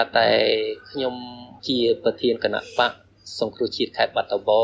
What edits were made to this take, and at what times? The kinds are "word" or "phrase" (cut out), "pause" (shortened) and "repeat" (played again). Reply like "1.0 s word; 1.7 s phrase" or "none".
1.6 s pause